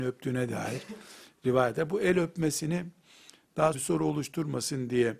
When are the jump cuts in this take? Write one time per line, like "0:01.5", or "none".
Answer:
0:03.7